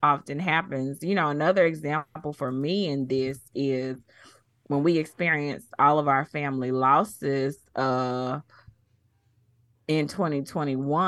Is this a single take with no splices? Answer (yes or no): yes